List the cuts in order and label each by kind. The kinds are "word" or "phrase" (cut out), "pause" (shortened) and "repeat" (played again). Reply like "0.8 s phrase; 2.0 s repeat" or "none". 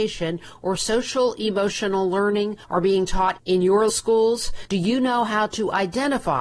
3.9 s word